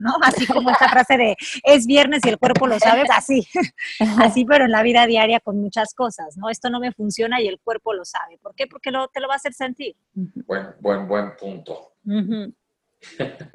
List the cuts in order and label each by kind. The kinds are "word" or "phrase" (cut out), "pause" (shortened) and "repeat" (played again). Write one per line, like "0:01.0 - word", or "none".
0:03.1 - word
0:10.0 - pause
0:12.0 - pause